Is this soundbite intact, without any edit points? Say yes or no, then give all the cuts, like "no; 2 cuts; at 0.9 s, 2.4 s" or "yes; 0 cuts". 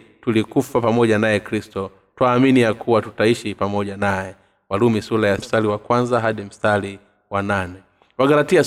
no; 1 cut; at 5.4 s